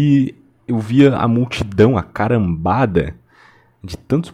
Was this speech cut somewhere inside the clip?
no; 0 cuts

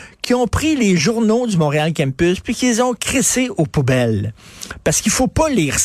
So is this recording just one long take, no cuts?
yes; 0 cuts

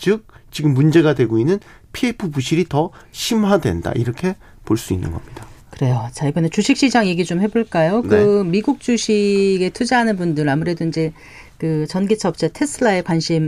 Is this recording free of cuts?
yes; 0 cuts

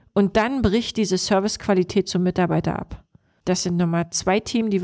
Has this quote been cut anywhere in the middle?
no; 0 cuts

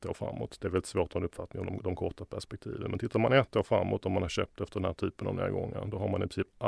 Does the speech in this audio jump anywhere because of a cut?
no; 0 cuts

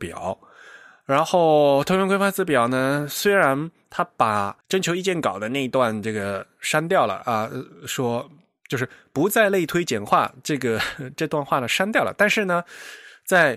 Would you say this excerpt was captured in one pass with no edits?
no; 1 cut; at 4.6 s

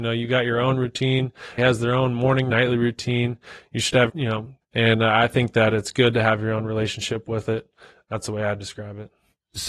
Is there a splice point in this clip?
yes; 4 cuts; at 1.6 s, 2.5 s, 4.1 s, 4.6 s

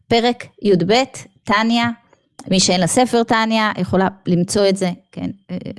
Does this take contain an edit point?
no; 0 cuts

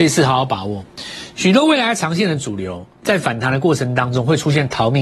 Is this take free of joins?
yes; 0 cuts

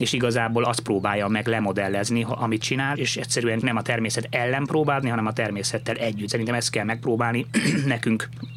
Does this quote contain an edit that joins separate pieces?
yes; 5 cuts; at 2.6 s, 2.9 s, 3.6 s, 5.0 s, 6.3 s

